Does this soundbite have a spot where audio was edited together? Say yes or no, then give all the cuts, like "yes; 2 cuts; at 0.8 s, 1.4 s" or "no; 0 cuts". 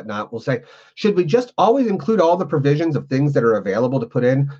no; 0 cuts